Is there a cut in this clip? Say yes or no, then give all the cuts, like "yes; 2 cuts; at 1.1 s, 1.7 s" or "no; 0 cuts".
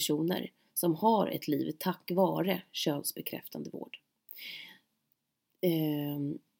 no; 0 cuts